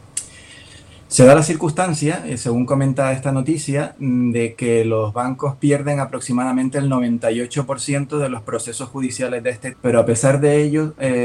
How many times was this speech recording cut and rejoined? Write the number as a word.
one